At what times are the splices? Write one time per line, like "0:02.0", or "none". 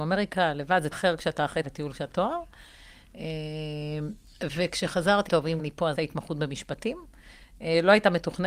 0:00.9
0:01.6
0:02.1
0:05.3
0:05.6
0:06.0

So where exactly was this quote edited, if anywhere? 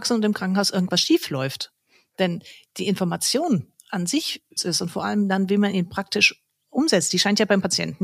0:04.6

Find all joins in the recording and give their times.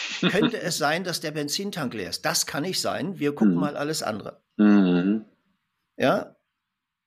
none

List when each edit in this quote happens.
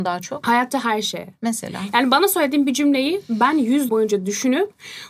0:03.9

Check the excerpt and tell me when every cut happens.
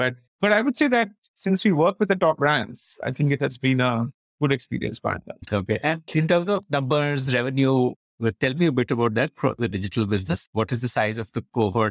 none

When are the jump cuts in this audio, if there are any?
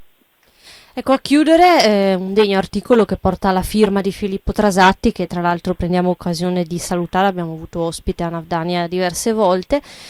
none

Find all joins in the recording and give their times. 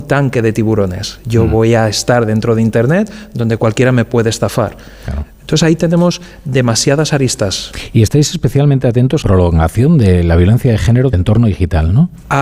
0:09.2
0:11.1

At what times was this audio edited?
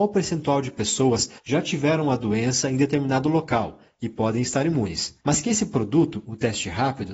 0:01.4
0:05.2

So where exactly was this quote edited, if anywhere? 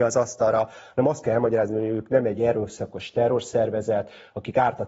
none

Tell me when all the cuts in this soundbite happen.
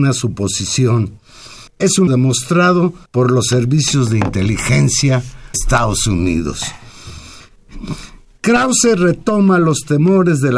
0:01.7
0:02.1
0:03.1
0:05.5

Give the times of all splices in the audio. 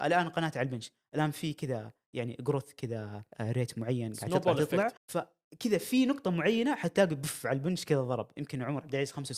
0:03.3
0:05.0

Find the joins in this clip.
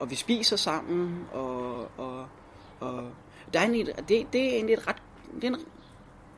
none

